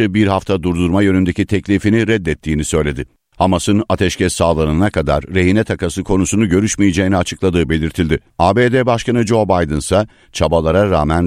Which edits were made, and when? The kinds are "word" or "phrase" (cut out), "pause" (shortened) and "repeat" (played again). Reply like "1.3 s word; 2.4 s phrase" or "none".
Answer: 8.3 s pause